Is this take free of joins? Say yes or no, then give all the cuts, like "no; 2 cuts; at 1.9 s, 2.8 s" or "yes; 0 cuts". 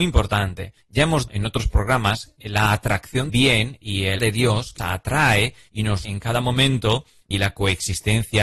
no; 7 cuts; at 1.3 s, 2.4 s, 3.3 s, 4.2 s, 4.8 s, 6.0 s, 7.3 s